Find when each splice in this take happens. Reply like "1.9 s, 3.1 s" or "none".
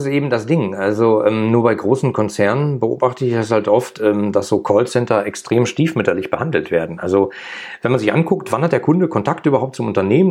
none